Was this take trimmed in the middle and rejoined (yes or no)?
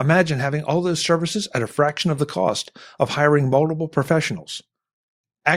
no